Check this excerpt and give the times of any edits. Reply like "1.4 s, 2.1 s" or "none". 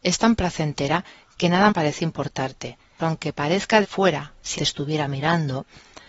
1.7 s, 3.0 s, 3.8 s, 4.6 s